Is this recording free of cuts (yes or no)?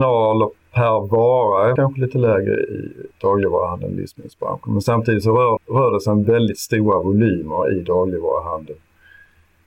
no